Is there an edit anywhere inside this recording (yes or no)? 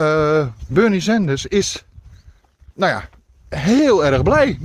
no